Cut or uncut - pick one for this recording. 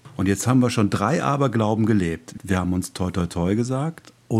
cut